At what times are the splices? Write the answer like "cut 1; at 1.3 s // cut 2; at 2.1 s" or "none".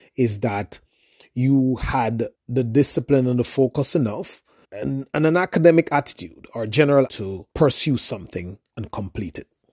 cut 1; at 2.3 s // cut 2; at 4.6 s // cut 3; at 7.1 s // cut 4; at 7.5 s